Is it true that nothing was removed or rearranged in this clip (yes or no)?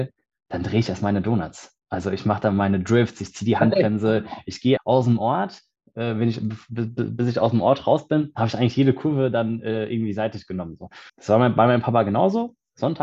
no